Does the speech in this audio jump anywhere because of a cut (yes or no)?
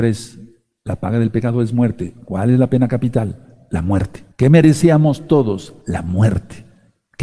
yes